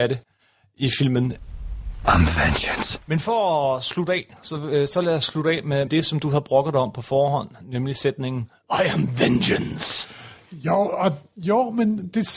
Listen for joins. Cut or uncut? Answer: cut